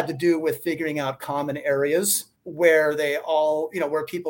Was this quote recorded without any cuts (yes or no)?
no